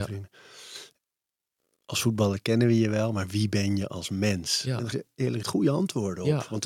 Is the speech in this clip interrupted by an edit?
yes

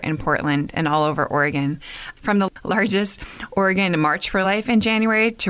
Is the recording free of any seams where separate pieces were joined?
yes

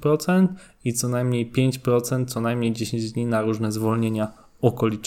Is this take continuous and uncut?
yes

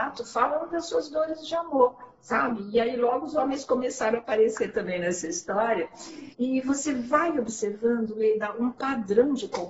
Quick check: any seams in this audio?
yes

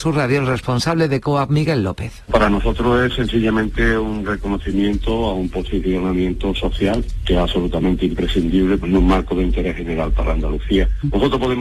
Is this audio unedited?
yes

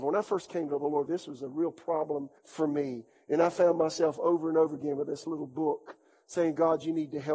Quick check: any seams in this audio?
yes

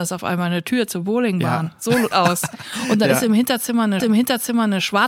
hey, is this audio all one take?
no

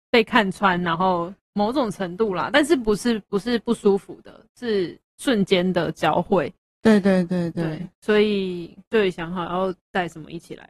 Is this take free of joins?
no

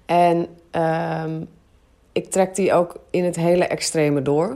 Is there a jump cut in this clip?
no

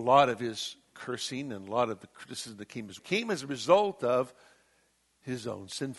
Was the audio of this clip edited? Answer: yes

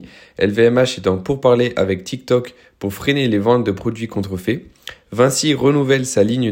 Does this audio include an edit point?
no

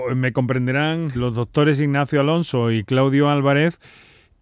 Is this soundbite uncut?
no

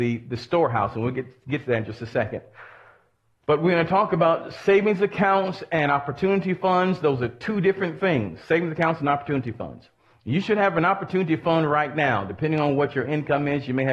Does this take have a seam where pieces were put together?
no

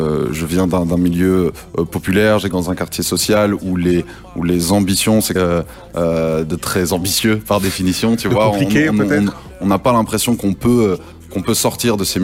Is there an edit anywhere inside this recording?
yes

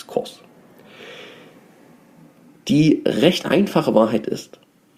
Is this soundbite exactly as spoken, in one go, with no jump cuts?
yes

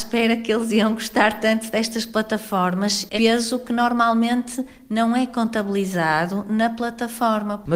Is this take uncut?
no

